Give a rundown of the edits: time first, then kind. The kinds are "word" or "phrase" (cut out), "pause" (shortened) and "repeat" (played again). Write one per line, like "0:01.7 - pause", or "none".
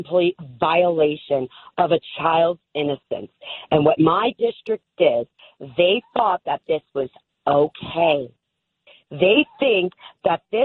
none